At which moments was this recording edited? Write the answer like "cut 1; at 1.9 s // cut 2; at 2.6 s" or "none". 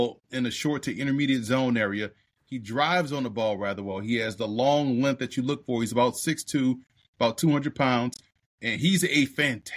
none